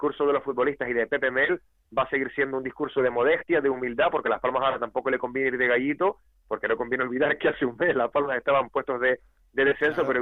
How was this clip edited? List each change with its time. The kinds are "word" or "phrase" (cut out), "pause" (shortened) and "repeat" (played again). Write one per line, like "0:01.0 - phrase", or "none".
none